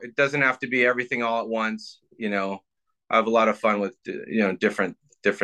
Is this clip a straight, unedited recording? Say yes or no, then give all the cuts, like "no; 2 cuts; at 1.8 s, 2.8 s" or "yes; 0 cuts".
yes; 0 cuts